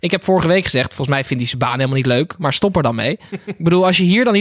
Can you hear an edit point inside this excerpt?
no; 0 cuts

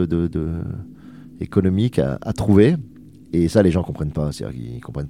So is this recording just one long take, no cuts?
yes; 0 cuts

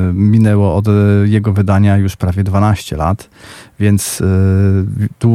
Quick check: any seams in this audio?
no; 0 cuts

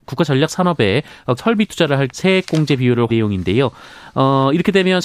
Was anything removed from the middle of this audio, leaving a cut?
yes; 3 cuts; at 1.4 s, 2.1 s, 3.1 s

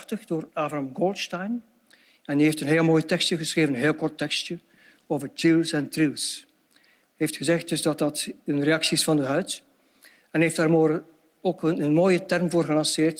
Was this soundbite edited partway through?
no; 0 cuts

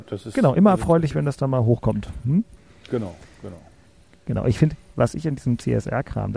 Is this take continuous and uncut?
yes; 0 cuts

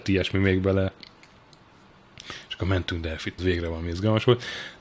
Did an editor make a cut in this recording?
yes; 1 cut; at 3.4 s

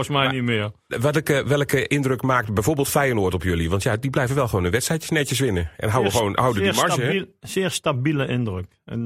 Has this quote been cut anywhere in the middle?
no; 0 cuts

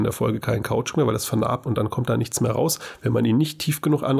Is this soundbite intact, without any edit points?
no; 1 cut; at 1.7 s

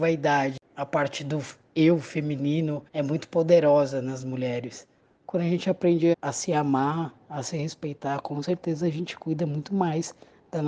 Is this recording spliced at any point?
yes; 3 cuts; at 2.9 s, 5.0 s, 6.1 s

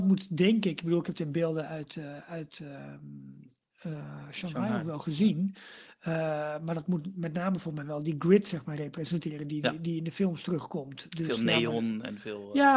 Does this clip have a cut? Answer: no; 0 cuts

